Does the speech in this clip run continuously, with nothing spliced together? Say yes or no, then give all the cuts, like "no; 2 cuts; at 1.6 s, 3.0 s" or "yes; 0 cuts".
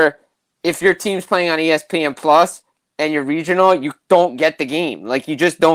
yes; 0 cuts